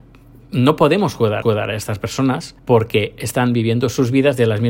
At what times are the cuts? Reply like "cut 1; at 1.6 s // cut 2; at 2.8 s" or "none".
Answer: cut 1; at 1.4 s // cut 2; at 2.6 s